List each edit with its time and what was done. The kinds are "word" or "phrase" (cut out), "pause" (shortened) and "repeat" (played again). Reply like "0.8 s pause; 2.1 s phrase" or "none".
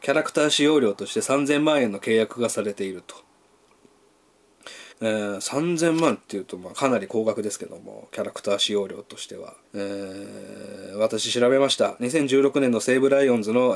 4.9 s pause; 9.6 s pause

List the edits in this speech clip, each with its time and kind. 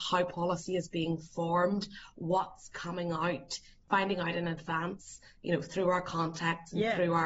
none

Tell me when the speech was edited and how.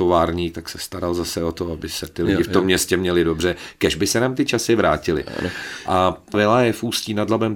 6.3 s word

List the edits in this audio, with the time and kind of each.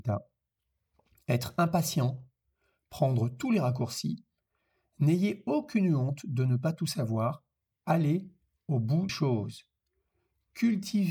9.1 s word

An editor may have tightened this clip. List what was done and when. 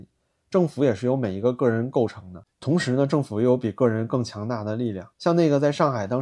2.5 s pause; 5.1 s pause

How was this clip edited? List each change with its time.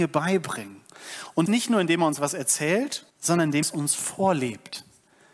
1.5 s word; 3.1 s pause; 3.6 s word

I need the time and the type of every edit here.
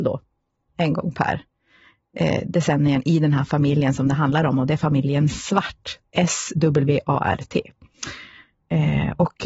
none

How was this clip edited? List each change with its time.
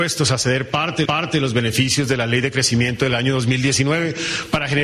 1.0 s repeat

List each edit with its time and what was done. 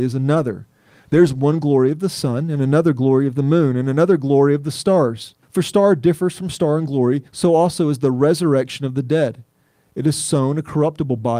5.4 s pause; 7.3 s pause

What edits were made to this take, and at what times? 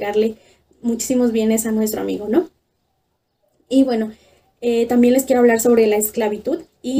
none

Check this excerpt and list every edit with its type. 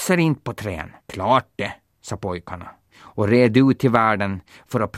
1.0 s pause

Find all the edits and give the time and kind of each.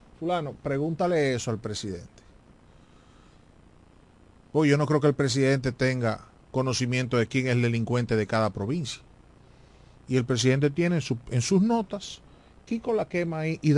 none

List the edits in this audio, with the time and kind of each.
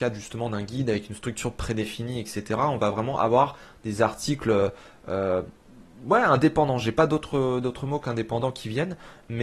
none

